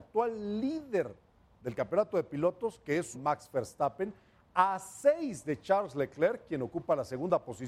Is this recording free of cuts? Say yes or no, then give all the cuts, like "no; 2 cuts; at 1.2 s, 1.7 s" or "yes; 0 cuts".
no; 1 cut; at 3.1 s